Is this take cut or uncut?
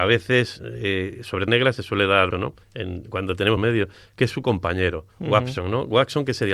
cut